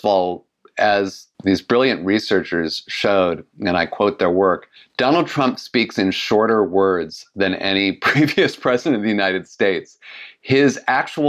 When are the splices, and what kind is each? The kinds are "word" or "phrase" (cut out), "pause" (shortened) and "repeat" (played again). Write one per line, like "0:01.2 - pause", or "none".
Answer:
0:01.3 - word
0:04.8 - pause